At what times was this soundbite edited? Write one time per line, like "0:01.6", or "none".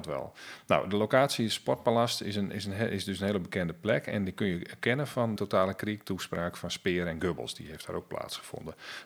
0:05.4